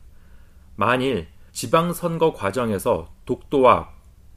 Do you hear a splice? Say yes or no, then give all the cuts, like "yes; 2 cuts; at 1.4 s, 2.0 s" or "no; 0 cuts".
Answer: yes; 1 cut; at 1.5 s